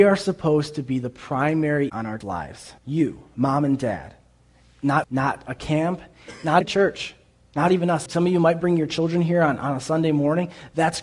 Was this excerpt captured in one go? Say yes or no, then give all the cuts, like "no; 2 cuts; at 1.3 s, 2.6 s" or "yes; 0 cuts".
no; 6 cuts; at 1.9 s, 2.2 s, 2.8 s, 5.0 s, 6.6 s, 8.1 s